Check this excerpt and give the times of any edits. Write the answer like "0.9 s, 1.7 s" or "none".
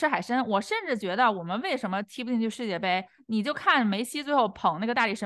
none